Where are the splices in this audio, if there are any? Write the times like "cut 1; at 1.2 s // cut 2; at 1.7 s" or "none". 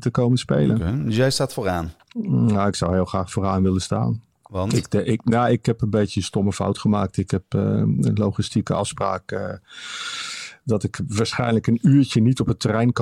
cut 1; at 2.0 s // cut 2; at 4.3 s